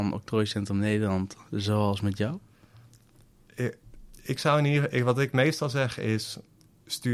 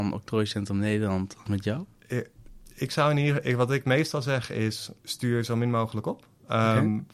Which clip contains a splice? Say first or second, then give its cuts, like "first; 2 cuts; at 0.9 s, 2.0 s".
second; 3 cuts; at 1.5 s, 1.9 s, 5.0 s